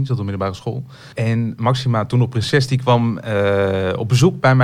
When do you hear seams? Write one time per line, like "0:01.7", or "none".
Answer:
0:01.1